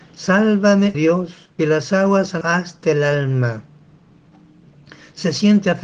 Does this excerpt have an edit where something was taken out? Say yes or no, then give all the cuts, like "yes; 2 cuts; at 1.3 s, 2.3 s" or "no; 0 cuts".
yes; 3 cuts; at 0.9 s, 1.6 s, 2.4 s